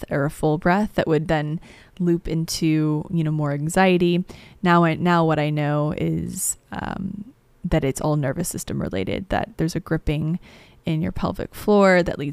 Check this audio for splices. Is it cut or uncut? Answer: uncut